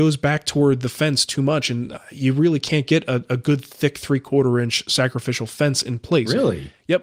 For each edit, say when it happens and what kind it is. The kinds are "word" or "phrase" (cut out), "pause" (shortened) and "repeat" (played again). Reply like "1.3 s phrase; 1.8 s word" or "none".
none